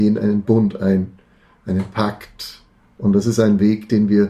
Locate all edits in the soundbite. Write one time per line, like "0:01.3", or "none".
none